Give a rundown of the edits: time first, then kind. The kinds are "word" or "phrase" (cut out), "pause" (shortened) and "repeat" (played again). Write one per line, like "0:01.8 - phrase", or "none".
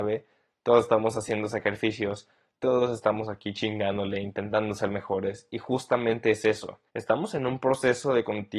0:06.9 - pause